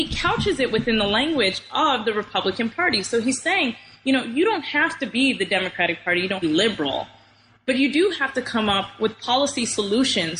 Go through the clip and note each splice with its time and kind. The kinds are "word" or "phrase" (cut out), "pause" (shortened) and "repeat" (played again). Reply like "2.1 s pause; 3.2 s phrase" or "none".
6.4 s phrase